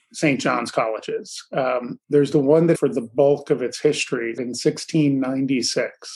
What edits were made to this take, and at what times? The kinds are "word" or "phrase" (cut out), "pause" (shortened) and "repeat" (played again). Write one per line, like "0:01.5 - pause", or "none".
0:02.0 - pause
0:02.7 - word
0:04.4 - word